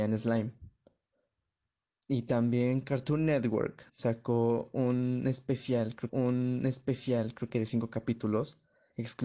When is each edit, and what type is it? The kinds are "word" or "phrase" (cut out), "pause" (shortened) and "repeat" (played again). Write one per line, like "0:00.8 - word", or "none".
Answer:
0:03.9 - pause
0:06.1 - repeat